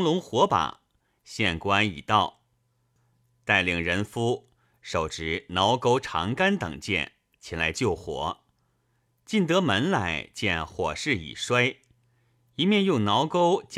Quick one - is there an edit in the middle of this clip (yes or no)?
no